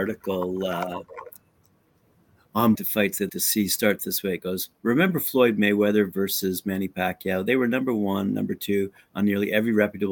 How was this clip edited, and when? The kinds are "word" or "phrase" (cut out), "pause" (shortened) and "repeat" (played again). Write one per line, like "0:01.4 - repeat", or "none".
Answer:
0:02.7 - phrase
0:03.3 - word
0:04.0 - word